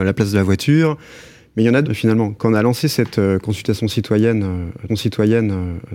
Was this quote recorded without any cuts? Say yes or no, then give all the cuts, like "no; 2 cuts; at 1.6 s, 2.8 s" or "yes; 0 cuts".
no; 2 cuts; at 1.8 s, 4.9 s